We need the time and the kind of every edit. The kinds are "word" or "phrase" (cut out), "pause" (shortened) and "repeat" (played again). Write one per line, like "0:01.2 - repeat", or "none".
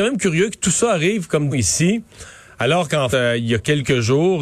0:01.5 - word
0:03.1 - word